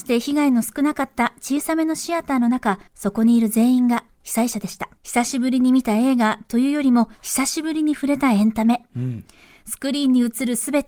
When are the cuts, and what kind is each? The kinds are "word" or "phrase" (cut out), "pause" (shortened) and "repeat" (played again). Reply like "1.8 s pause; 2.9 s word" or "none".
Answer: 2.9 s pause; 5.0 s pause; 7.1 s pause